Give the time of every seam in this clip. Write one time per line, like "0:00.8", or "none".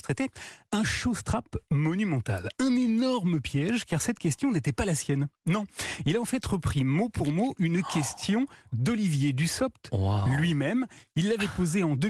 none